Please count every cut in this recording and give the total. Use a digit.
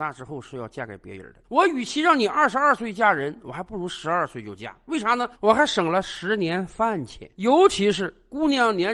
3